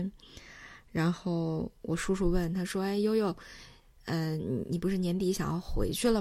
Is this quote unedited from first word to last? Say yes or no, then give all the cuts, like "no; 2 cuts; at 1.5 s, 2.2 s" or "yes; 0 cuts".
yes; 0 cuts